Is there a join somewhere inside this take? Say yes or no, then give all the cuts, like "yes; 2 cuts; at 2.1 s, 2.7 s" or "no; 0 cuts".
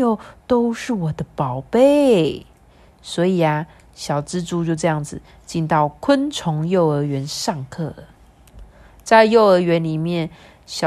no; 0 cuts